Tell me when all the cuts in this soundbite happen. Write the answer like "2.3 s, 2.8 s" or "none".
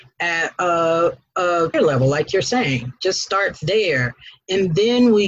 1.7 s